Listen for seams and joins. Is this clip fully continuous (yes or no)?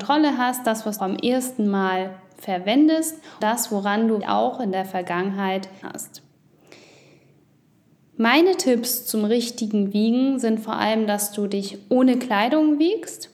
no